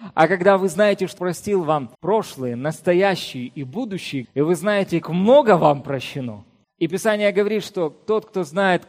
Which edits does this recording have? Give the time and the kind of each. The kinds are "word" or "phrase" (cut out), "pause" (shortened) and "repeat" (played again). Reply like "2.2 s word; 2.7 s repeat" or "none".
1.2 s word; 1.9 s pause; 4.2 s word; 5.0 s word; 6.6 s pause

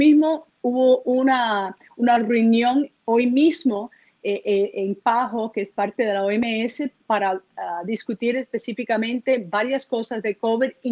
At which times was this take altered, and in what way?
none

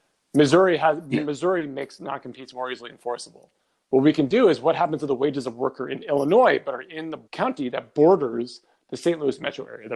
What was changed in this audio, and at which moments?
7.3 s pause

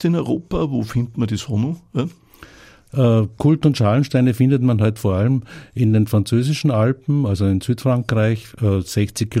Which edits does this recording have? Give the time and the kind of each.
none

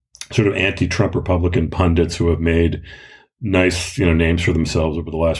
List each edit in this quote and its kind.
none

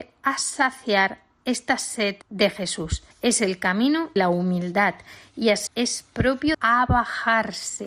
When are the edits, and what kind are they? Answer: 2.2 s pause; 3.1 s pause; 4.2 s word; 5.7 s phrase; 6.5 s phrase

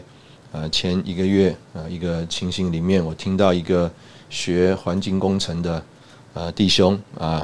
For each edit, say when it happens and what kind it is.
none

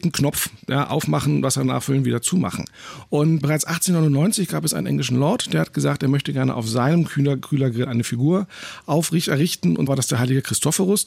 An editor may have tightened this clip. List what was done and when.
3.4 s word; 9.9 s word

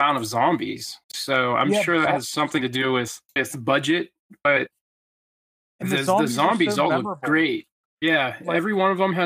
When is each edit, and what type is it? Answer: 1.0 s pause; 3.2 s pause

